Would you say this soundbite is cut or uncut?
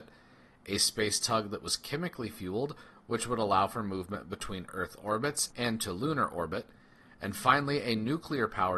uncut